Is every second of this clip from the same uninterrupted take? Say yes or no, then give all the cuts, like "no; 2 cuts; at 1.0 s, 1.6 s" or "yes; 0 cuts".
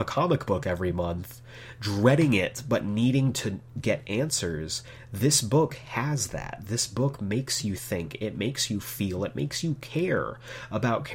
yes; 0 cuts